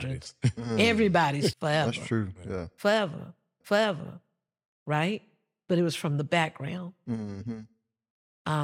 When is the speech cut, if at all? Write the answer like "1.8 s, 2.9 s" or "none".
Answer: 1.5 s, 3.6 s